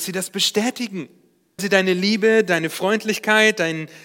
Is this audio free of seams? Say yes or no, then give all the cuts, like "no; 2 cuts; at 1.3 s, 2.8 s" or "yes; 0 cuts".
no; 1 cut; at 1.6 s